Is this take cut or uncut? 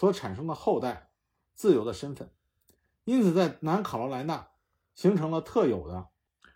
uncut